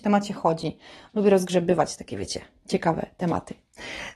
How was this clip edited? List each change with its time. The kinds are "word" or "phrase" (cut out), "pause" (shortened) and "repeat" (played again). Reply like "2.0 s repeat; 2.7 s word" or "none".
2.6 s word